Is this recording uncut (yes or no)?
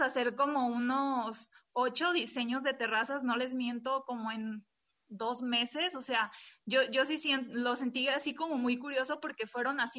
yes